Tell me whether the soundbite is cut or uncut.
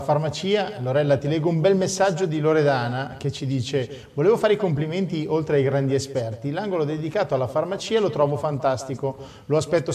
uncut